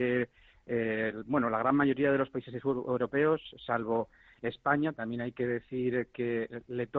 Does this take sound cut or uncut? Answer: uncut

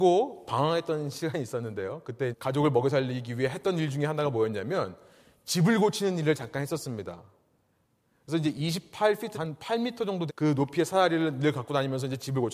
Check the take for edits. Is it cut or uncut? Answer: cut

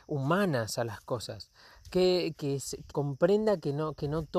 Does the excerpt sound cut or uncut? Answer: cut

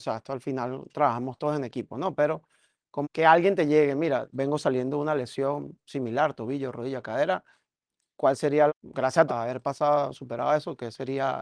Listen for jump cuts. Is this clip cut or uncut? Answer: cut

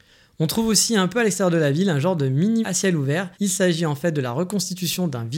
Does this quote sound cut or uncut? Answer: cut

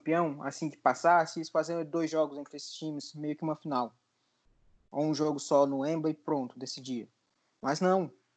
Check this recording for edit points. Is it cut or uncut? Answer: uncut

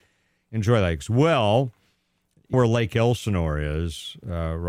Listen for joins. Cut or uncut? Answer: cut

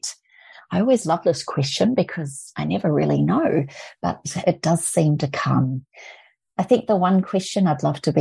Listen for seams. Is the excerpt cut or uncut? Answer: uncut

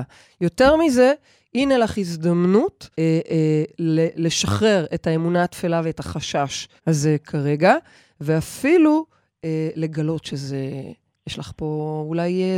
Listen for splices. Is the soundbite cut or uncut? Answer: cut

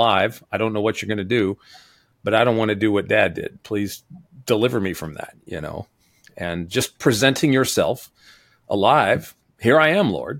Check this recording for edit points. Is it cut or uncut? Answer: uncut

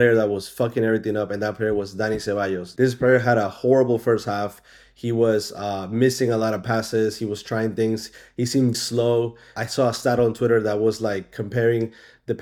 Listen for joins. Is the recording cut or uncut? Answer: cut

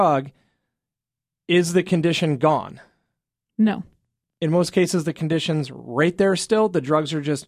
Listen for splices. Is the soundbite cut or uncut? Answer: uncut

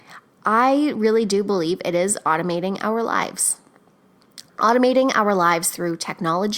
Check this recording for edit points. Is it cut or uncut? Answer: uncut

